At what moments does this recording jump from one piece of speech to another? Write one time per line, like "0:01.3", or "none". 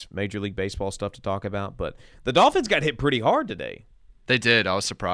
none

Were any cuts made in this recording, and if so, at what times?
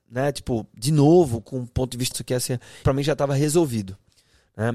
0:02.1
0:02.8

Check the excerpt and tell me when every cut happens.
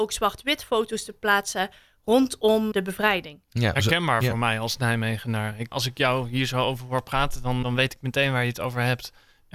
0:02.7
0:05.7
0:07.6

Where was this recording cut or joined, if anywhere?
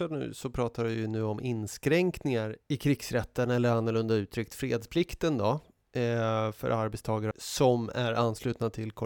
0:02.6
0:07.3

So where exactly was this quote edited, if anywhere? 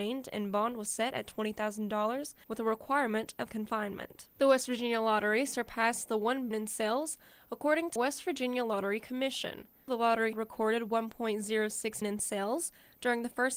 0:03.5
0:06.5
0:08.0
0:10.3
0:12.0

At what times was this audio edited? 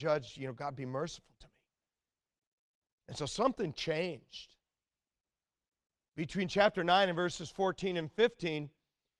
none

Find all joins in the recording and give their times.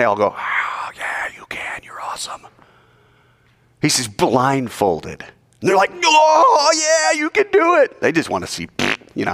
none

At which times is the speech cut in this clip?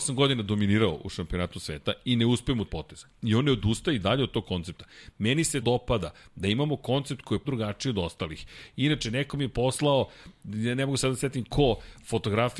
0:02.7
0:05.6
0:07.4

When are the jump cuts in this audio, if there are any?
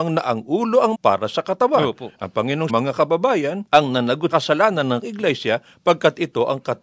0:00.9
0:02.7
0:03.7
0:04.3
0:05.0

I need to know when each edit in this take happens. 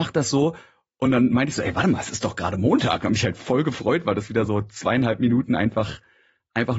none

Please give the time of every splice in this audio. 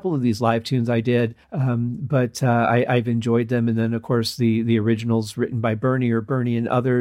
0:01.4

